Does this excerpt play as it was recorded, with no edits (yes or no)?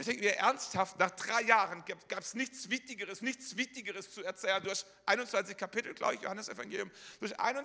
no